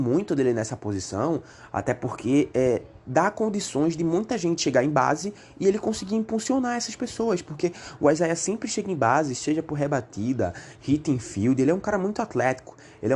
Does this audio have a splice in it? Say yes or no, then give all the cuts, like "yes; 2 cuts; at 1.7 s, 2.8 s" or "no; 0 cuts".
no; 0 cuts